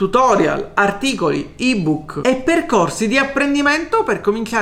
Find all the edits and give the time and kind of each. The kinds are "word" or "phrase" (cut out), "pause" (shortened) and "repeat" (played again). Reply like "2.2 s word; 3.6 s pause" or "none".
none